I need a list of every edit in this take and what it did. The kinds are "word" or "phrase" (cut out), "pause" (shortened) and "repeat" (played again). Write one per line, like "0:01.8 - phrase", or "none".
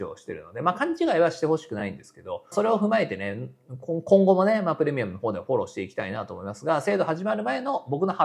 0:02.5 - phrase